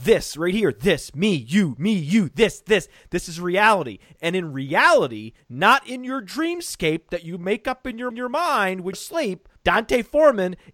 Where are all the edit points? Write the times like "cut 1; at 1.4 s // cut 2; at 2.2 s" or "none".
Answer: cut 1; at 2.6 s // cut 2; at 8.1 s // cut 3; at 8.9 s